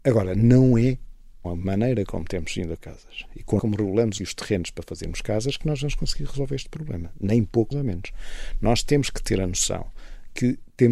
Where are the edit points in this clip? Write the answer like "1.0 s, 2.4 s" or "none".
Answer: 1.4 s, 2.8 s, 3.6 s, 4.2 s, 7.7 s